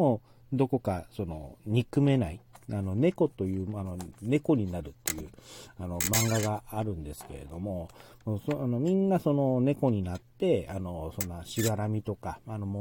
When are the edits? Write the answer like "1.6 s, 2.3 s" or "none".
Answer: none